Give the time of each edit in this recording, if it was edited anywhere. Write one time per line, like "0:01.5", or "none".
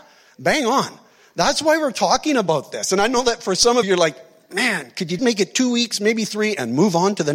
0:03.8
0:05.2